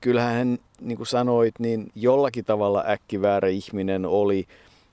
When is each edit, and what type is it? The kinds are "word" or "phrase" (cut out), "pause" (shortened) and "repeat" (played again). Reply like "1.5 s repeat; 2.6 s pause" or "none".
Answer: none